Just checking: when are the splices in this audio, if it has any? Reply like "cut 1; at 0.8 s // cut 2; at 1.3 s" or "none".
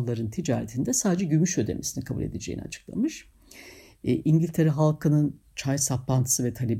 none